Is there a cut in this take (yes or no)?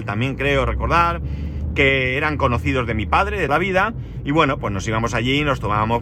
yes